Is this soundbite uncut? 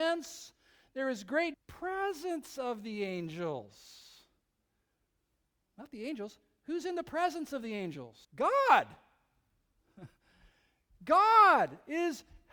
no; 2 cuts; at 1.5 s, 8.2 s

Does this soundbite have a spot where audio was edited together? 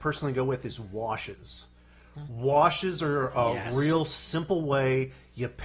no; 0 cuts

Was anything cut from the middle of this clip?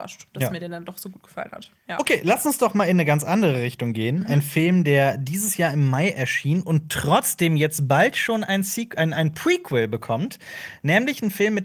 no; 0 cuts

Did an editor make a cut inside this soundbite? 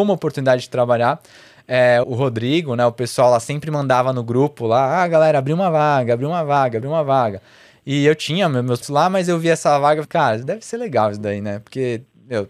yes; 3 cuts; at 2.0 s, 8.8 s, 10.0 s

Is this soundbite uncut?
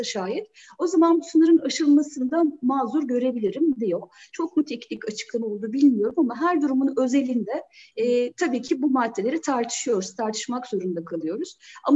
yes; 0 cuts

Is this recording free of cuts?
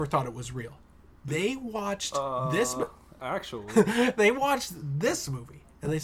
yes; 0 cuts

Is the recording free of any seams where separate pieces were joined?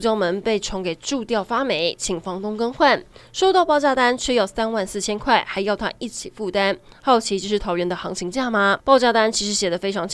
no; 1 cut; at 8.8 s

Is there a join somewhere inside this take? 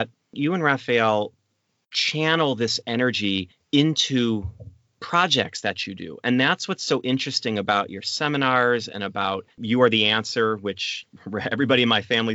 no; 0 cuts

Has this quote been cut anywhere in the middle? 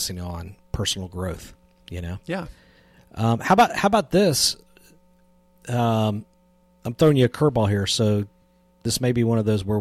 no; 0 cuts

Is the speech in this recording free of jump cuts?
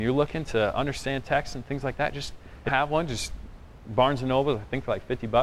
no; 1 cut; at 2.7 s

